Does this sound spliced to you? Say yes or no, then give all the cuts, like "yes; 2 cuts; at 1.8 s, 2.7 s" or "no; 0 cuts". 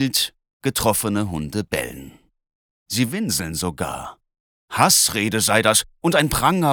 no; 0 cuts